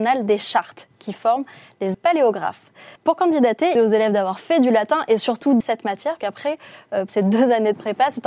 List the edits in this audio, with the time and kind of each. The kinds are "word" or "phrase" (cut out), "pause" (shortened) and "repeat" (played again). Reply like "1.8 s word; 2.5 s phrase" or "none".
1.9 s word; 3.0 s pause; 3.8 s phrase; 5.6 s word; 6.2 s word; 7.1 s word